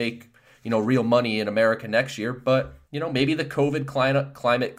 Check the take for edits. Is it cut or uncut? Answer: cut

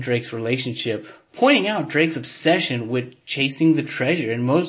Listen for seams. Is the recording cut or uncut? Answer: uncut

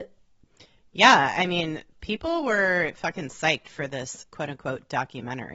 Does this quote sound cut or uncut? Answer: uncut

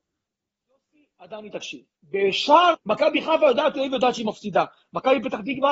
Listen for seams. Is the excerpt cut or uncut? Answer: cut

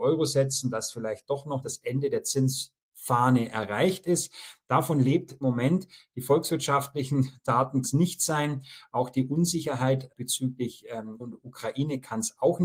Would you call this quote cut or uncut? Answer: cut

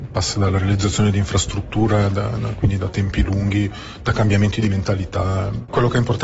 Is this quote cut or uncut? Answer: uncut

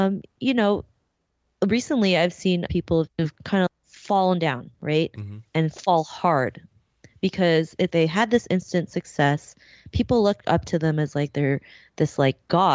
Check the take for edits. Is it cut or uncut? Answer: cut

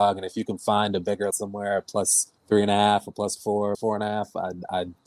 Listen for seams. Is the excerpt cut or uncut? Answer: cut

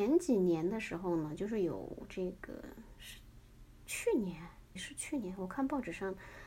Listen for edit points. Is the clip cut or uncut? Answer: cut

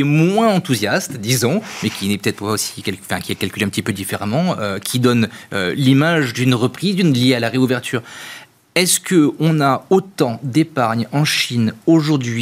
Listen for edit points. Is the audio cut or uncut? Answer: uncut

